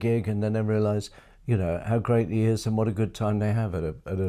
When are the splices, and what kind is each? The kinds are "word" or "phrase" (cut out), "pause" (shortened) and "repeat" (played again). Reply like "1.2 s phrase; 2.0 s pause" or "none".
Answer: none